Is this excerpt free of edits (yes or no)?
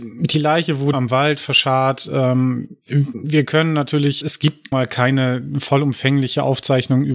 no